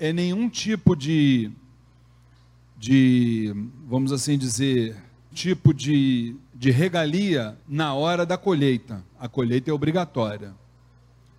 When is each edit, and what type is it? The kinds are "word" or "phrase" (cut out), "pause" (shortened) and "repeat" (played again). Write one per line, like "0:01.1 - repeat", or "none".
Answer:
0:05.3 - phrase
0:06.5 - pause
0:07.6 - pause